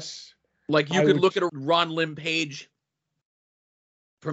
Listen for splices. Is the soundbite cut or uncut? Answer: cut